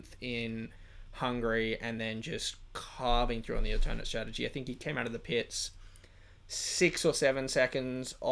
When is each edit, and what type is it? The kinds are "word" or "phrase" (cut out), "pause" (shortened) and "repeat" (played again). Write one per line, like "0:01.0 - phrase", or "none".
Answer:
none

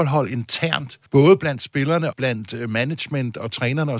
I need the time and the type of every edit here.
0:01.1 - pause
0:02.1 - word

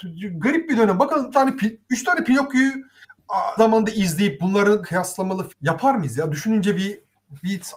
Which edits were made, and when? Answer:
0:01.3 - word
0:03.6 - word
0:04.8 - word
0:05.5 - word

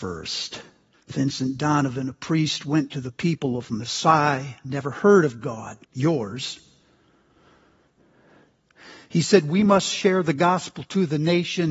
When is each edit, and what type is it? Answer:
0:00.9 - pause
0:05.8 - pause

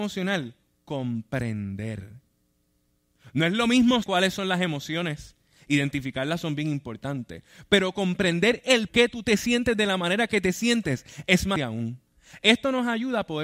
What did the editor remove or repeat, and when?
0:04.0 - word
0:08.9 - word
0:11.6 - word

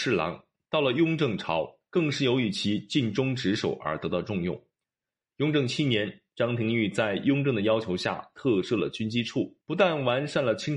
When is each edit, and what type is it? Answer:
0:09.6 - pause

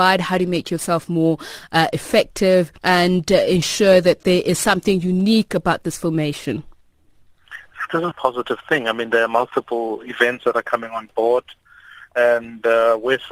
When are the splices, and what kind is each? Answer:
0:02.8 - pause
0:08.1 - word

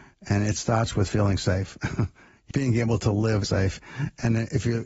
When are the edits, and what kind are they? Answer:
0:02.5 - word
0:03.4 - phrase

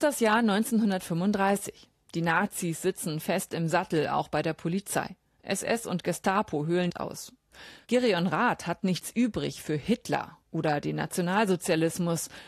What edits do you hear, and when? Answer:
0:06.9 - phrase

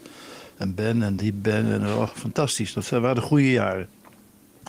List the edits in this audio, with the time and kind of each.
none

